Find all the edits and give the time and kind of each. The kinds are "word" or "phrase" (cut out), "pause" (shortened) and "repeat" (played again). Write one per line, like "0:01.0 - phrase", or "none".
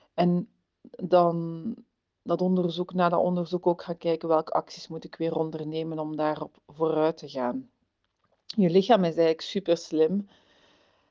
none